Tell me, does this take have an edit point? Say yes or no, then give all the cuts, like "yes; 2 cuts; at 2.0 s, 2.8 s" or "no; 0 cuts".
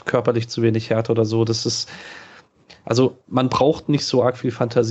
no; 0 cuts